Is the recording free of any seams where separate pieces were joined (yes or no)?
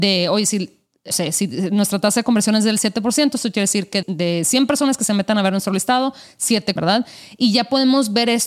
no